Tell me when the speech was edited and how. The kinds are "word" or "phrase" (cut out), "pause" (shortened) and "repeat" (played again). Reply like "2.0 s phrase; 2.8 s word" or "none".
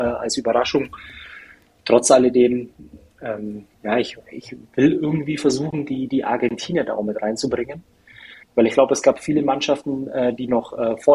3.7 s pause; 8.4 s pause